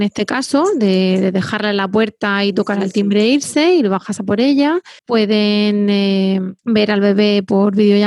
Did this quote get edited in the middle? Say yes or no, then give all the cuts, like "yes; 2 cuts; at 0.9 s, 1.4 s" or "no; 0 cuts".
yes; 2 cuts; at 5.0 s, 6.6 s